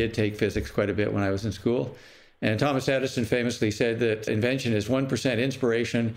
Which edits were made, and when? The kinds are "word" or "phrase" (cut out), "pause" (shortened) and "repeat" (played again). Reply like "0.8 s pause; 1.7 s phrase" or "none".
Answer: 4.3 s word